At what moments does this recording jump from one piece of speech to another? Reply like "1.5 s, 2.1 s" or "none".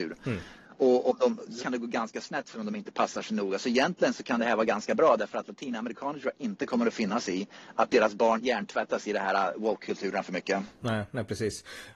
1.6 s, 2.5 s, 8.4 s